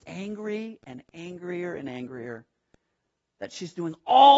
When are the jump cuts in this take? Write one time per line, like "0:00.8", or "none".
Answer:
none